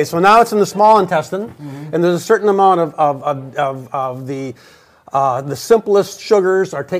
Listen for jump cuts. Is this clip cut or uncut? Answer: uncut